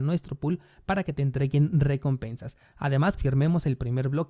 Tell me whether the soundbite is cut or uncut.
cut